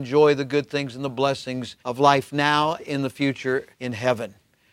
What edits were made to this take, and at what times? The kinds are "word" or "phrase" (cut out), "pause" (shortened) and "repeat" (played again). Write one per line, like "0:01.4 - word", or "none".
0:01.8 - pause
0:02.8 - word
0:03.7 - pause